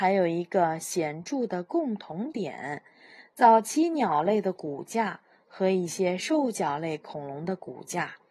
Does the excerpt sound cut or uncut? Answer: uncut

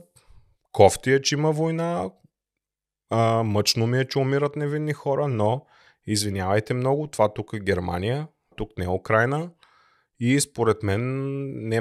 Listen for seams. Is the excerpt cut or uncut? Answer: cut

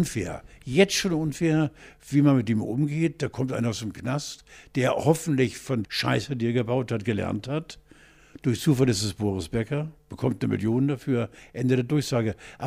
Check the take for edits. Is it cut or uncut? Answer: cut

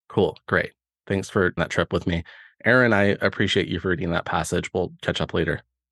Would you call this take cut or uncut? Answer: cut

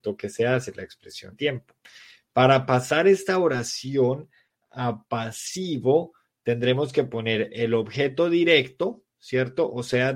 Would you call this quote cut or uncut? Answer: cut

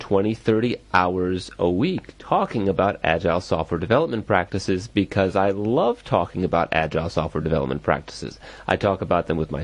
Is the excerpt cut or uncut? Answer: uncut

